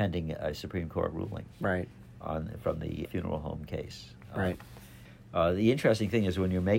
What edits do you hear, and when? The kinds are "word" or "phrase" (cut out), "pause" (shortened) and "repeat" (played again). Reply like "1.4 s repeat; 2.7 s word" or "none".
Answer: 3.0 s word